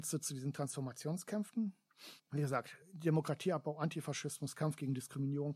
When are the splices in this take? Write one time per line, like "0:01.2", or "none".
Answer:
0:02.2
0:02.8